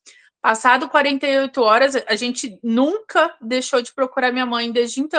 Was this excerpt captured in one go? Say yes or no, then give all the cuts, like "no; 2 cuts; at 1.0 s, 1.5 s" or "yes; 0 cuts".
yes; 0 cuts